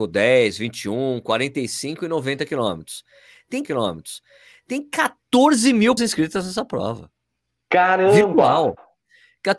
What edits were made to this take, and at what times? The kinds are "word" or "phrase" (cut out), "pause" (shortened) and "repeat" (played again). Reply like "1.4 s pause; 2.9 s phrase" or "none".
3.6 s repeat; 6.0 s word